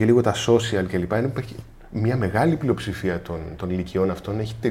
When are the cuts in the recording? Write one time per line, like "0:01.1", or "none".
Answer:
none